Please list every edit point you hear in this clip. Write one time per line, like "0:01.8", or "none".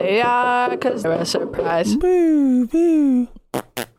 0:01.0